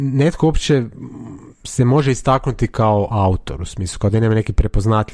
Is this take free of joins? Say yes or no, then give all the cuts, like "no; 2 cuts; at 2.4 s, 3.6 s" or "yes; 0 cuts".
yes; 0 cuts